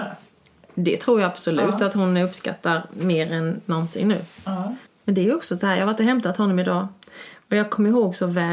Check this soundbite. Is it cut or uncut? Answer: cut